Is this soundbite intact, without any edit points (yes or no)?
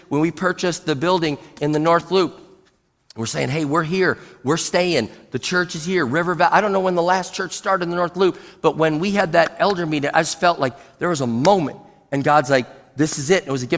yes